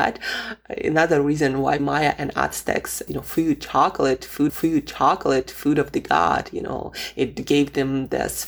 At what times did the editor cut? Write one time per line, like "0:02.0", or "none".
0:01.8
0:03.1
0:04.5